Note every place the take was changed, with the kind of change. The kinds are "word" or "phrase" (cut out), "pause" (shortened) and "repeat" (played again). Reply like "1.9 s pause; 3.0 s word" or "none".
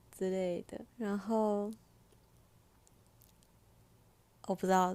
0.9 s pause